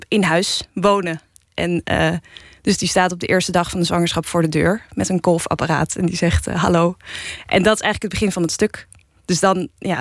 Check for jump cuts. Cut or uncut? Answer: uncut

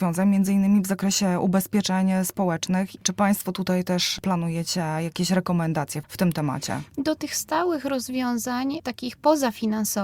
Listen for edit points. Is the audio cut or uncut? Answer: uncut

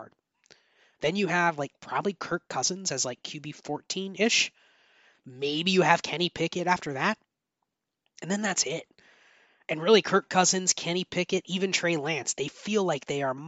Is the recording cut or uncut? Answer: uncut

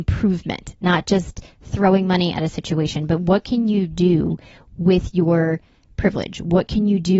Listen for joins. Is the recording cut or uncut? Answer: uncut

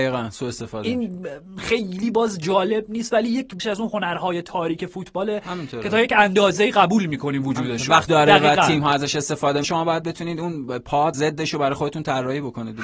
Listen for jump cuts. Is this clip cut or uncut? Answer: cut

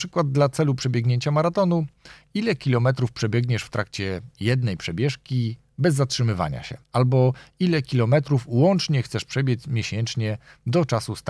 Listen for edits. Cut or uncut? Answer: cut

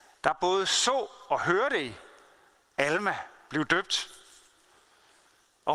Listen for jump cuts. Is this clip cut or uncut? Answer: uncut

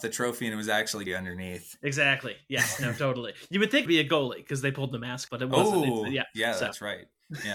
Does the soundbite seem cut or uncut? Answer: cut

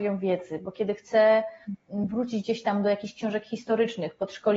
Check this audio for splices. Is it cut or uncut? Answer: uncut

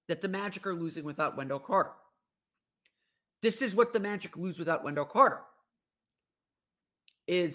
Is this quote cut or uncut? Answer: uncut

